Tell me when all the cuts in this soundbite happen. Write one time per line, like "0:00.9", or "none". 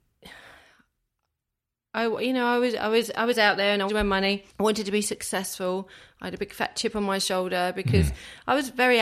0:03.9
0:04.5